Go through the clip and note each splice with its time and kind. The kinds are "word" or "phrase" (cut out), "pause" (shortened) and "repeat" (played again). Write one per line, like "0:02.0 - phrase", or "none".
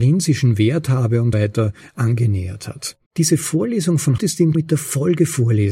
0:01.3 - word
0:03.1 - pause
0:04.2 - word
0:04.5 - word